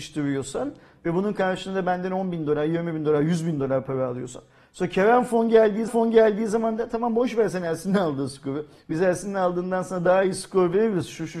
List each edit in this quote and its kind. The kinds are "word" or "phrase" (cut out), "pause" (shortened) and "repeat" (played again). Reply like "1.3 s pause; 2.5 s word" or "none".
5.9 s repeat